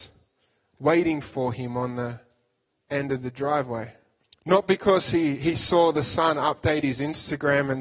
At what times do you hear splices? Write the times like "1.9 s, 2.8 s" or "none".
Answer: 4.2 s